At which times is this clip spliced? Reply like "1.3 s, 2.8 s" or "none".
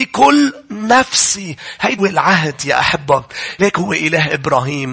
2.0 s, 3.6 s